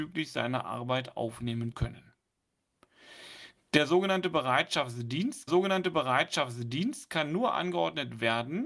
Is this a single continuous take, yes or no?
no